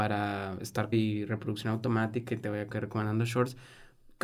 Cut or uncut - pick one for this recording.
cut